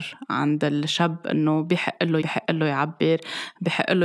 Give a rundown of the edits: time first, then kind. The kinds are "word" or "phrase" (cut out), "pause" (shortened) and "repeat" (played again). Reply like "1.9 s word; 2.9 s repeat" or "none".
2.2 s word